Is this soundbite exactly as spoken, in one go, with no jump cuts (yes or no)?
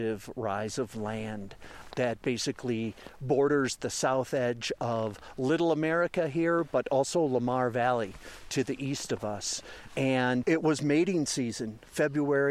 yes